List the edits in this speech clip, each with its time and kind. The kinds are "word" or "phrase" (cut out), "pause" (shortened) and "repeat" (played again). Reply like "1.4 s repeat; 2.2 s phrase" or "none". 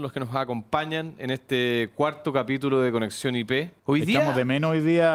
3.8 s pause